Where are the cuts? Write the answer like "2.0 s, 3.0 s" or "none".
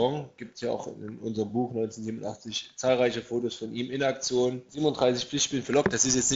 none